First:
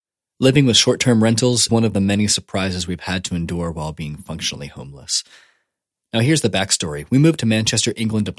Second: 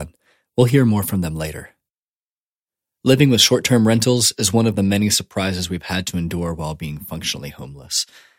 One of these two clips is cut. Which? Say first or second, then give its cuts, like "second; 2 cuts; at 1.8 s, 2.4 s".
first; 1 cut; at 1.7 s